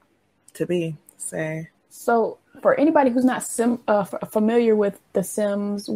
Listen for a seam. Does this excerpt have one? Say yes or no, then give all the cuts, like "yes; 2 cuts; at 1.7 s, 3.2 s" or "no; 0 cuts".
yes; 1 cut; at 1.8 s